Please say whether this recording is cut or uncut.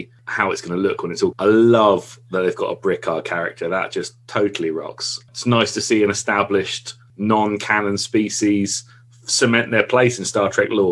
cut